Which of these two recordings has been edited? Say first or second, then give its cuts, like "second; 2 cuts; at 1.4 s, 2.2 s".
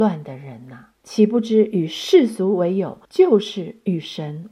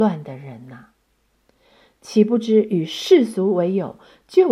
first; 2 cuts; at 1.0 s, 3.0 s